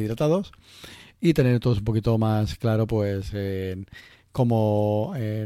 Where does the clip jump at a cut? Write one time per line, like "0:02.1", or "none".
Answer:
none